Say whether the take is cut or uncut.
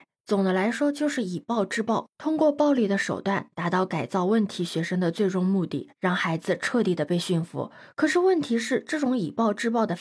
uncut